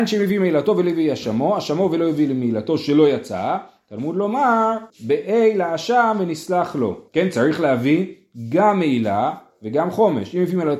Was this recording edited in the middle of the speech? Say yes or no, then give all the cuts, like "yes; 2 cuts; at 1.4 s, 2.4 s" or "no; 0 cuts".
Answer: yes; 2 cuts; at 4.9 s, 7.1 s